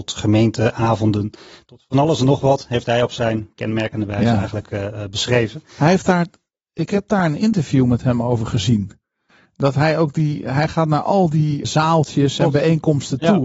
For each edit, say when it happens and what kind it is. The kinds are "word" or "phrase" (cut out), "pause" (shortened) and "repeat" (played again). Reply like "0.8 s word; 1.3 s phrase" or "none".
11.6 s word